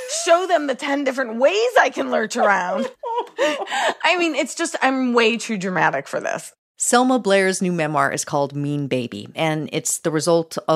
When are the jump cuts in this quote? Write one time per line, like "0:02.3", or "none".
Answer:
0:02.9